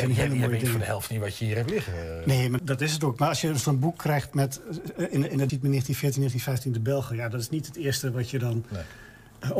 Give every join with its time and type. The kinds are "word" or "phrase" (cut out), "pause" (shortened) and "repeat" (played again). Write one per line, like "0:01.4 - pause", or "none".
0:02.6 - word
0:05.5 - word